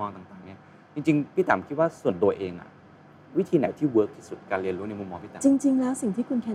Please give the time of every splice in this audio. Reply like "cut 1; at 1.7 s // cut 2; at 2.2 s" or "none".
none